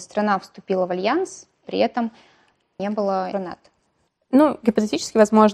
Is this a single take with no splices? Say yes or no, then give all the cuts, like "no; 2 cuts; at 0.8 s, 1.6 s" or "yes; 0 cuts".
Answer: no; 3 cuts; at 1.6 s, 2.8 s, 3.3 s